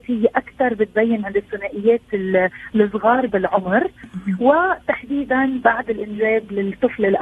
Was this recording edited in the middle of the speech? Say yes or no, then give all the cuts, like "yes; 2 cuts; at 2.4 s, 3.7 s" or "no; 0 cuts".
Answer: no; 0 cuts